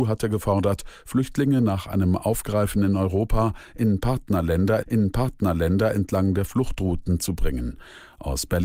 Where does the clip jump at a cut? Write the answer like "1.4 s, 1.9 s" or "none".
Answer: 4.8 s